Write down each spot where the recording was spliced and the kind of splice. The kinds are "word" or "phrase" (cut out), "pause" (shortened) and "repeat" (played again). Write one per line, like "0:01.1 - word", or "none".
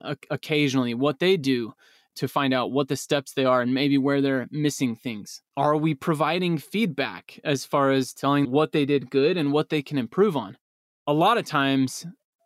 0:05.5 - pause
0:08.4 - word